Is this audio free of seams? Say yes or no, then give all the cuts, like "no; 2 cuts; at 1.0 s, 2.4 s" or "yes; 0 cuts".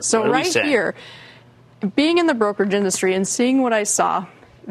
yes; 0 cuts